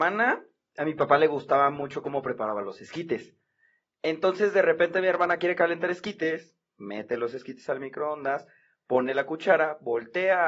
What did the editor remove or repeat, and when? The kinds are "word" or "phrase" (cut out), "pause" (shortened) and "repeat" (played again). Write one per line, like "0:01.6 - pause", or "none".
none